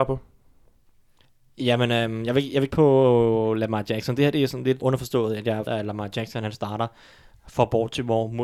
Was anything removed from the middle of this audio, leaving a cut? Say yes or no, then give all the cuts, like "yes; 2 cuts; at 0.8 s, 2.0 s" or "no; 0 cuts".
yes; 3 cuts; at 2.7 s, 4.8 s, 5.7 s